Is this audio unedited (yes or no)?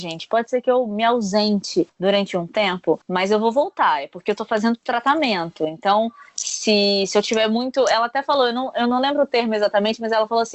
no